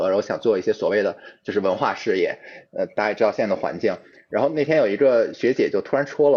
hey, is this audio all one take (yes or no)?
yes